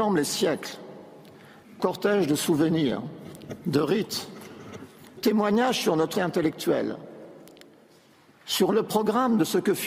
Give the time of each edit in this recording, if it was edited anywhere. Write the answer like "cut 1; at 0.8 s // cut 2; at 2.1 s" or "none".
cut 1; at 1.8 s // cut 2; at 5.2 s // cut 3; at 6.1 s